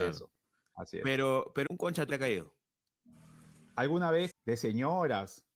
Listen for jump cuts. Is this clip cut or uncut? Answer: cut